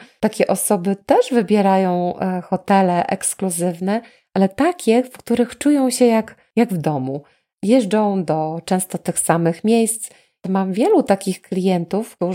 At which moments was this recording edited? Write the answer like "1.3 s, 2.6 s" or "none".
none